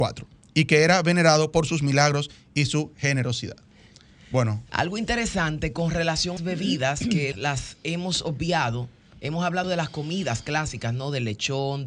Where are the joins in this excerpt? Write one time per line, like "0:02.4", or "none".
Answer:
0:06.4
0:07.3
0:09.6